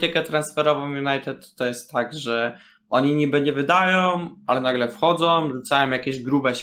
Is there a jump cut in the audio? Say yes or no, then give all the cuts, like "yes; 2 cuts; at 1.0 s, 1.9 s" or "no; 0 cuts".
no; 0 cuts